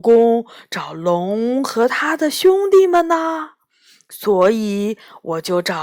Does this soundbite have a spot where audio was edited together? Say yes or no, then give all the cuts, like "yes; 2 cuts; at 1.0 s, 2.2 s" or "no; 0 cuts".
no; 0 cuts